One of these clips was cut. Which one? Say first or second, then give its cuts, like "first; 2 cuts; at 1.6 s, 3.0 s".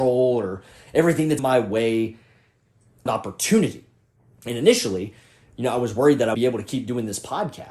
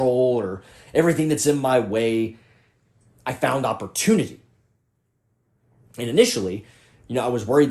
first; 4 cuts; at 1.4 s, 3.1 s, 4.2 s, 6.3 s